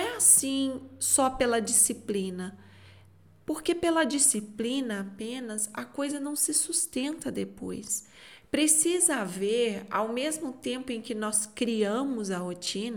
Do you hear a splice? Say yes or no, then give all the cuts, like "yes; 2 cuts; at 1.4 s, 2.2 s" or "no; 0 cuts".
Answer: no; 0 cuts